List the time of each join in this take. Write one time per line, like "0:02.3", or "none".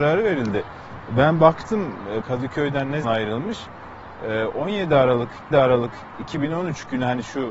0:02.2
0:03.0
0:05.5